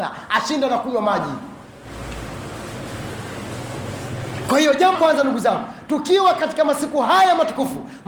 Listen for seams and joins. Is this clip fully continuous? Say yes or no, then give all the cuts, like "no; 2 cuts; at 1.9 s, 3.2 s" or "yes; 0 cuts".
no; 1 cut; at 4.9 s